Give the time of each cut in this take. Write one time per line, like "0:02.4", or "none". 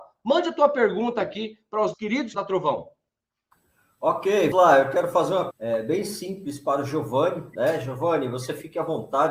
0:01.9
0:02.3
0:04.5
0:05.5